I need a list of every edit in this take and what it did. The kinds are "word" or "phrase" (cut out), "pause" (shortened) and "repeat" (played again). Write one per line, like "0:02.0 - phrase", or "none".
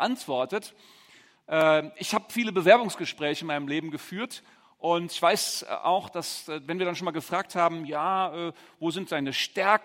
none